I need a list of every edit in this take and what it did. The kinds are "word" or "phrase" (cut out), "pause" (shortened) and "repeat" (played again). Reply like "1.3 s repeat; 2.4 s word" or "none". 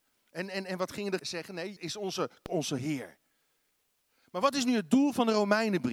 1.2 s word; 1.8 s word; 2.5 s word